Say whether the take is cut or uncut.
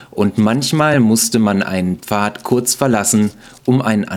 uncut